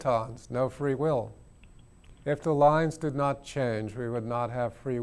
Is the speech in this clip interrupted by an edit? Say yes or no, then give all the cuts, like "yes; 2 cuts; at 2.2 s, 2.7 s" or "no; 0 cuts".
yes; 1 cut; at 2.2 s